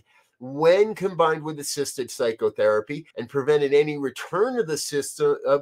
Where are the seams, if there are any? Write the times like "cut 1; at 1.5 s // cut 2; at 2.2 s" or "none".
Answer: cut 1; at 3.1 s